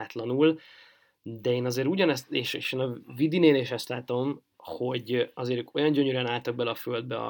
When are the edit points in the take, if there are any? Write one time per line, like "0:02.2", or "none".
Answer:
none